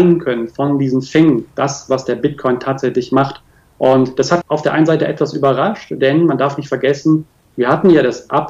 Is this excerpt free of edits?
no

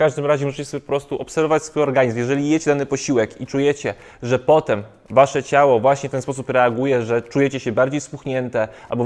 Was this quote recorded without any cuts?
yes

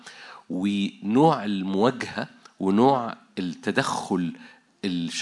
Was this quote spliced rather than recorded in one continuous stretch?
no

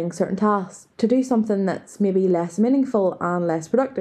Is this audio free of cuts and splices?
yes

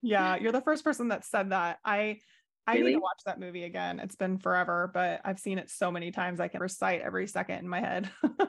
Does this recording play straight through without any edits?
no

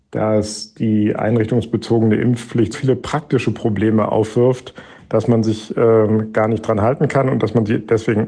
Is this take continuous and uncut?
no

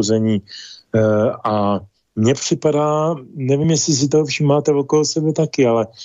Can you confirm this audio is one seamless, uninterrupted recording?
yes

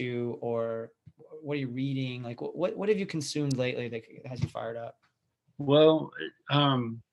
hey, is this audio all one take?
yes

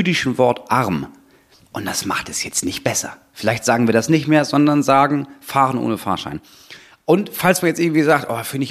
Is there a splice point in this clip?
no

